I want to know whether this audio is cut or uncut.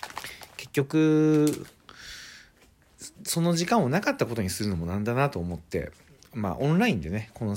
uncut